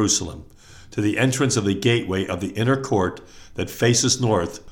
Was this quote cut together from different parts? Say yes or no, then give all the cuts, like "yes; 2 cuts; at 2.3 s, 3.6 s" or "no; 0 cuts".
no; 0 cuts